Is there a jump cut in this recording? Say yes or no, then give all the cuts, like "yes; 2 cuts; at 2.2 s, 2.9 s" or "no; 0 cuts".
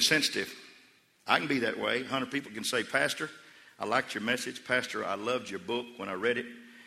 no; 0 cuts